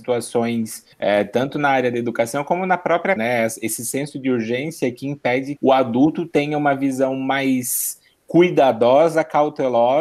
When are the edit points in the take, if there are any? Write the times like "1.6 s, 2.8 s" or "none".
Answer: 0.9 s, 3.2 s, 5.6 s